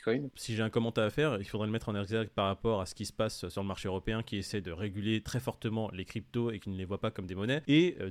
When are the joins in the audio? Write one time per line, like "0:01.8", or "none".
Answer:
none